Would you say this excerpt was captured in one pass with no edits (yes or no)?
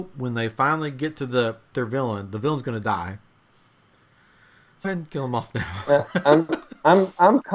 no